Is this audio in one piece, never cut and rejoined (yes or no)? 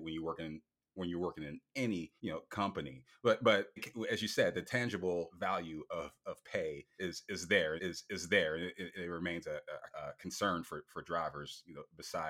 no